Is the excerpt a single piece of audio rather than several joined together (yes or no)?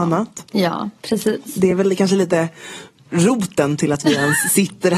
yes